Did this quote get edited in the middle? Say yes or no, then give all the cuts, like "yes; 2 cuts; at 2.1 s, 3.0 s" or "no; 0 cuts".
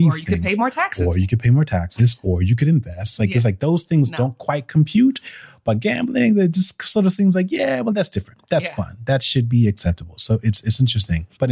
no; 0 cuts